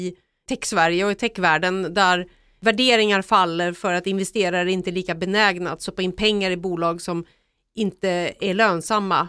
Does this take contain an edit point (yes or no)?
no